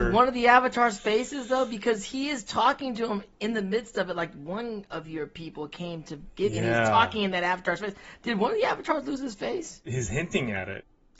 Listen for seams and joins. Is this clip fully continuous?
yes; 0 cuts

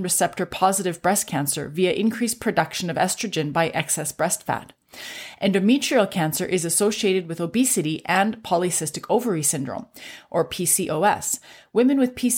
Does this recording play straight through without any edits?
yes; 0 cuts

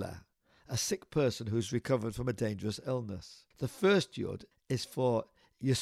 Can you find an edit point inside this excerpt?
yes; 2 cuts; at 3.5 s, 4.5 s

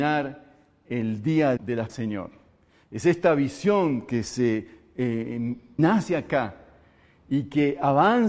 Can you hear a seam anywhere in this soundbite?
yes; 3 cuts; at 1.6 s, 1.9 s, 5.8 s

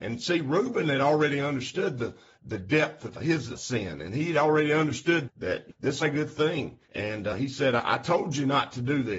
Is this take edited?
yes; 3 cuts; at 3.1 s, 6.0 s, 6.8 s

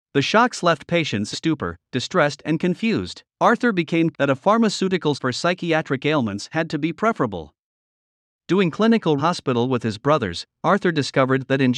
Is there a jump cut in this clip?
yes; 5 cuts; at 1.3 s, 3.3 s, 4.1 s, 5.1 s, 9.2 s

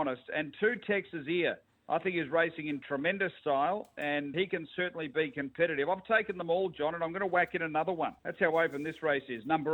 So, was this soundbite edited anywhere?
yes; 2 cuts; at 4.3 s, 8.2 s

